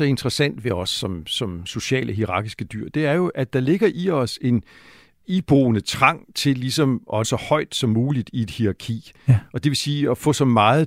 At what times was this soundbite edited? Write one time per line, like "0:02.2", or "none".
0:07.2